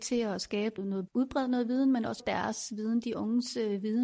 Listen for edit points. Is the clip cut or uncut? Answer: cut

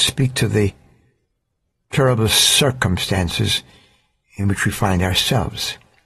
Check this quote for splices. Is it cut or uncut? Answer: uncut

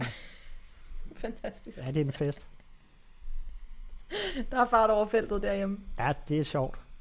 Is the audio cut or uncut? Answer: uncut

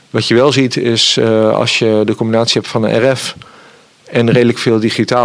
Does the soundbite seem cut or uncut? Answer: uncut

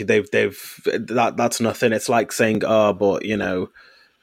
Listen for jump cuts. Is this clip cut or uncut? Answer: uncut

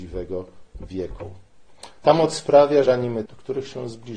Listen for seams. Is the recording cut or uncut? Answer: cut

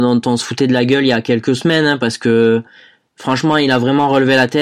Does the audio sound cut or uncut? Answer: uncut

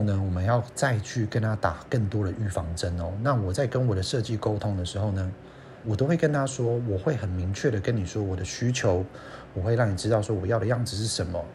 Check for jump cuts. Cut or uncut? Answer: cut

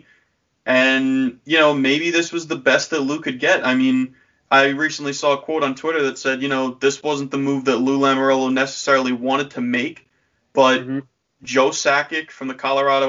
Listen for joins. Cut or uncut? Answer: uncut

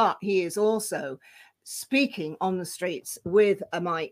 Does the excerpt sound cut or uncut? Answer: uncut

